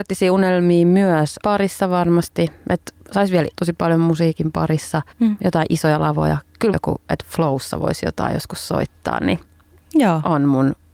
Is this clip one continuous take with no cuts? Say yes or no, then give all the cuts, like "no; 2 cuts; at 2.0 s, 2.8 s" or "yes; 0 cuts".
no; 5 cuts; at 1.4 s, 3.0 s, 3.5 s, 5.1 s, 6.7 s